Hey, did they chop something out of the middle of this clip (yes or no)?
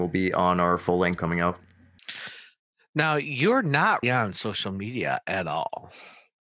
yes